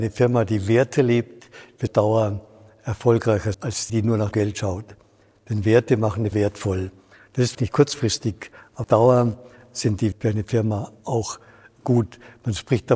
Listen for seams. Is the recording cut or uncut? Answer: cut